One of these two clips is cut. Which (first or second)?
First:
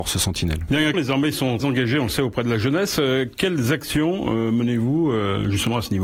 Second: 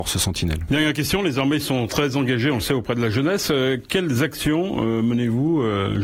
first